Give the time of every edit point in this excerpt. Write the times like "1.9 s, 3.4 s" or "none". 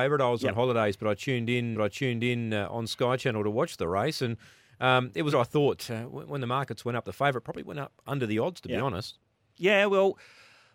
1.7 s, 5.3 s